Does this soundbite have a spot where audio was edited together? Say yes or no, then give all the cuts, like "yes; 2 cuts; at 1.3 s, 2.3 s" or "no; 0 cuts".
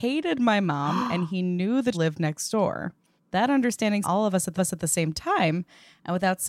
yes; 4 cuts; at 1.9 s, 3.2 s, 4.0 s, 4.6 s